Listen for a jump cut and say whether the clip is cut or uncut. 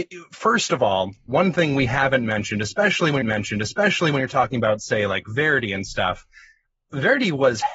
cut